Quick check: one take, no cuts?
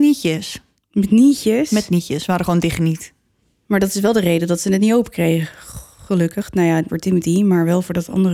no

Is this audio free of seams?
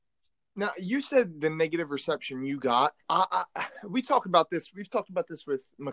no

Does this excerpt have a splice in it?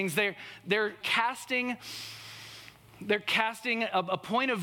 yes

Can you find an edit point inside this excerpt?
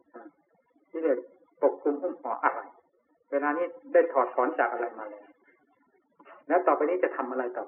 yes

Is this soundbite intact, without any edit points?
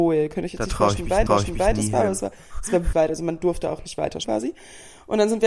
no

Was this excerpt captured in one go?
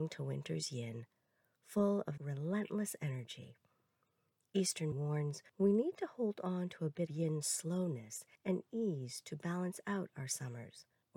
no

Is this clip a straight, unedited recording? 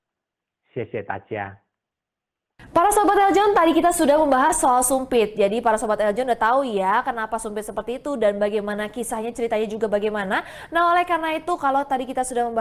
yes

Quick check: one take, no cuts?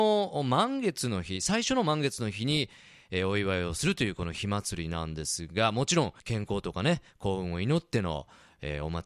no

